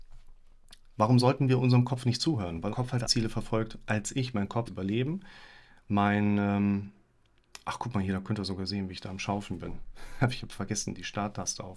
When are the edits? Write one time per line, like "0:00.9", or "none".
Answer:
0:02.7
0:03.0
0:04.7